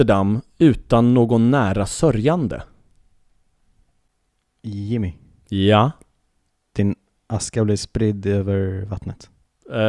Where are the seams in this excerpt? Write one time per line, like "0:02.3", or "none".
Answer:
none